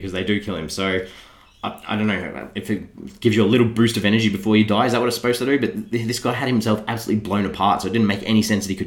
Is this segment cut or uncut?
uncut